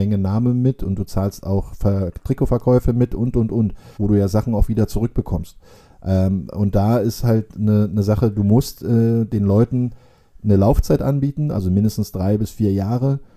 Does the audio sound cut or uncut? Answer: cut